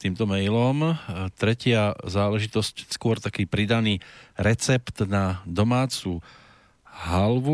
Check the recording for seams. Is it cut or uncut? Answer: cut